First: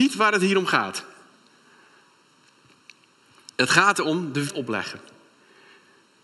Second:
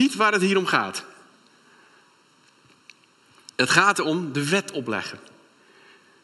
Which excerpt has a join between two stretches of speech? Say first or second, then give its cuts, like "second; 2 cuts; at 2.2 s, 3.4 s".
first; 1 cut; at 4.5 s